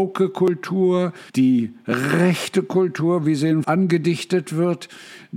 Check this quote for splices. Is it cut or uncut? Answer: cut